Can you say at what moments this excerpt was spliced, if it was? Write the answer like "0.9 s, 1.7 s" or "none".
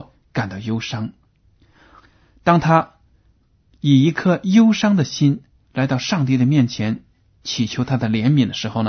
none

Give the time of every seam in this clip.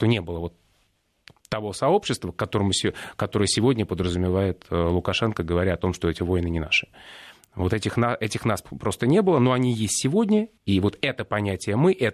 10.6 s

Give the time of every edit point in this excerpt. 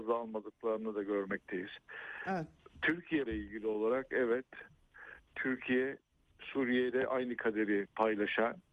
3.3 s

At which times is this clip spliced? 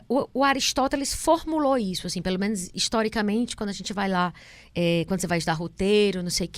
none

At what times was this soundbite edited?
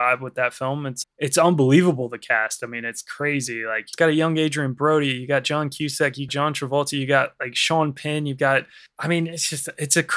1.0 s, 6.3 s

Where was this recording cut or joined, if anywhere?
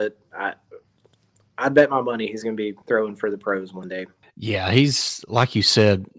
2.8 s, 4.2 s

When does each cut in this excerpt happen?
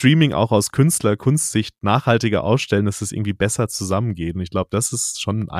none

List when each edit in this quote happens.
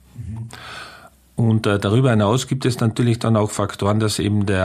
none

